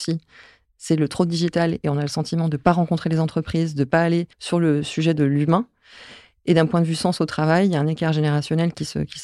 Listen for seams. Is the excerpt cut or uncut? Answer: cut